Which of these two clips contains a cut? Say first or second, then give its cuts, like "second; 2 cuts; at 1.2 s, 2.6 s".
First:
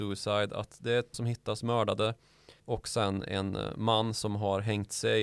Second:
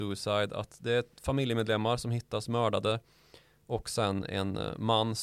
first; 2 cuts; at 1.1 s, 2.6 s